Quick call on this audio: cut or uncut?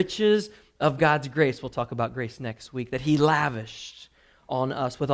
uncut